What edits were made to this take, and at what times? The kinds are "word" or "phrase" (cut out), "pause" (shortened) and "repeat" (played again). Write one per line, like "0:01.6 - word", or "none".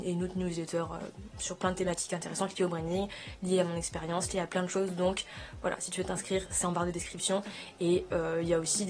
none